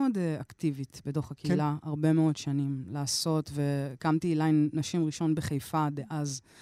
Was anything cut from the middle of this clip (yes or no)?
no